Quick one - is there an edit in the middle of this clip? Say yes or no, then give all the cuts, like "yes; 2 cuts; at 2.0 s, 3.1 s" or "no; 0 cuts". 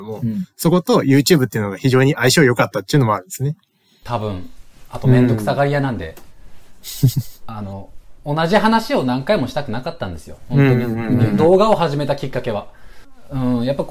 no; 0 cuts